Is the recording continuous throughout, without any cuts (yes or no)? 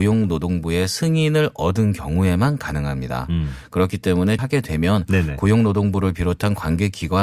no